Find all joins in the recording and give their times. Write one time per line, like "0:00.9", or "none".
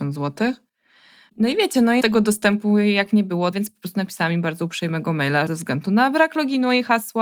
0:02.0
0:03.5
0:05.5